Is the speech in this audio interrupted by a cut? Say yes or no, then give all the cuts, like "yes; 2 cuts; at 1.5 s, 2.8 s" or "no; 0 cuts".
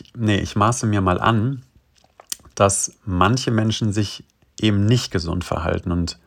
no; 0 cuts